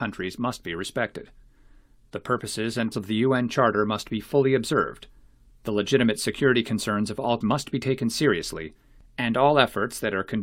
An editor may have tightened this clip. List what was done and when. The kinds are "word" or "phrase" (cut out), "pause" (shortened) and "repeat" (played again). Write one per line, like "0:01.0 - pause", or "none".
0:02.9 - word
0:07.4 - word

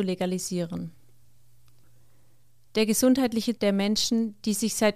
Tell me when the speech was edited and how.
0:03.6 - word

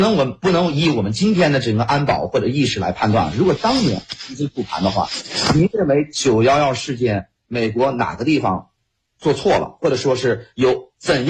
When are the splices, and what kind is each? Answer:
none

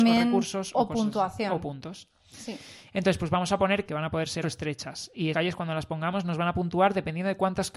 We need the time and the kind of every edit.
0:03.9 - word
0:04.4 - word
0:05.3 - word

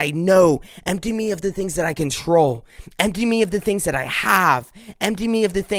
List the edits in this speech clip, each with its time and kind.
none

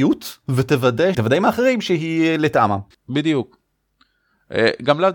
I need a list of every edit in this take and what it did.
0:01.1 - word
0:02.9 - pause

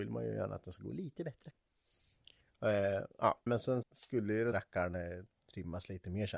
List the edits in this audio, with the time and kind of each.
0:03.5 - word
0:03.8 - word
0:04.5 - word

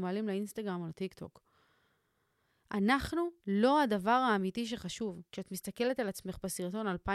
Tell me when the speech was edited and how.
0:03.4 - pause
0:05.3 - pause

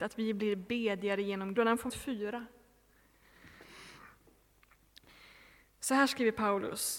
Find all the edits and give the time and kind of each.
0:01.5 - word
0:01.9 - phrase

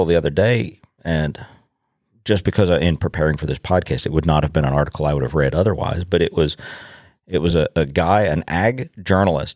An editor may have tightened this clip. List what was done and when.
none

